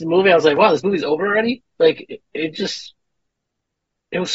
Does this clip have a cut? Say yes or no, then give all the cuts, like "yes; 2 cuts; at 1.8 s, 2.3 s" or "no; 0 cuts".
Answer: no; 0 cuts